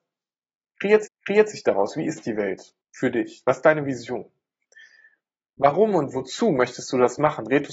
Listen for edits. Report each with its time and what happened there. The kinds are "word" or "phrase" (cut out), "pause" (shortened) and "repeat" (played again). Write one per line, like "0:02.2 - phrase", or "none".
0:01.1 - repeat
0:02.8 - pause